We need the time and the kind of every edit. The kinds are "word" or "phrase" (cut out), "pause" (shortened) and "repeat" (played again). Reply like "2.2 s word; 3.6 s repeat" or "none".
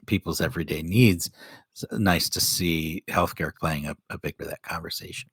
1.9 s word; 3.5 s word; 4.4 s word